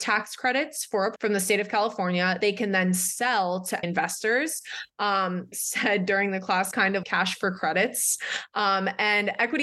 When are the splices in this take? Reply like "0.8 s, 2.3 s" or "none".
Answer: 1.2 s, 2.4 s, 3.8 s, 5.5 s, 6.7 s, 7.0 s